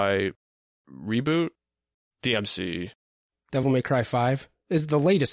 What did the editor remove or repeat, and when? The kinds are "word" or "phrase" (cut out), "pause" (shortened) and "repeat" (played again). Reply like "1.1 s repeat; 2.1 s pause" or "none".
none